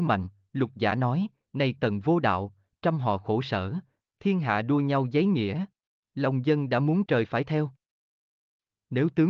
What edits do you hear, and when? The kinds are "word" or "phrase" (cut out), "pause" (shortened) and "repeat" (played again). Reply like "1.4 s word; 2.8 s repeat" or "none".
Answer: 1.8 s word; 5.9 s pause; 7.1 s word